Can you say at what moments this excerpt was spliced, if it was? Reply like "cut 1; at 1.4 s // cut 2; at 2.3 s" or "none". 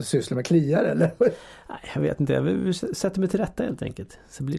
none